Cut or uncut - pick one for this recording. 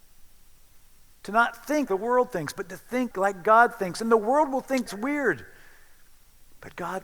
cut